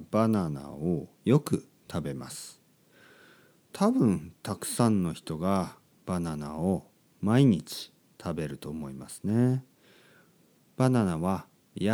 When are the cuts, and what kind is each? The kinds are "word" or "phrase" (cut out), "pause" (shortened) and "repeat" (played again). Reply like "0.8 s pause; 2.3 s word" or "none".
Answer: none